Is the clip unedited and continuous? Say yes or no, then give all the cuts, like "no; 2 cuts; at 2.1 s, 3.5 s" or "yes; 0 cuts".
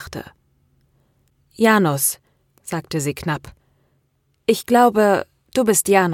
yes; 0 cuts